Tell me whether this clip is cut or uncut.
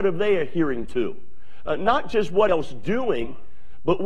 cut